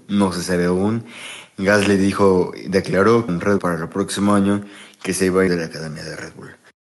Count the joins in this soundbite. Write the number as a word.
three